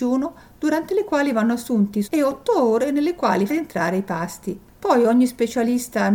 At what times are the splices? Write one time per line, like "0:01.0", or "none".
0:02.0
0:03.5